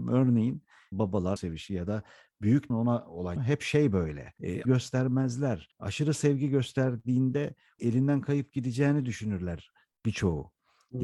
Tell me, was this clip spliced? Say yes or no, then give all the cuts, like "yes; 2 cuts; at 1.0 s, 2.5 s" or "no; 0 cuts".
yes; 7 cuts; at 0.9 s, 1.4 s, 2.7 s, 3.4 s, 4.6 s, 5.7 s, 7.8 s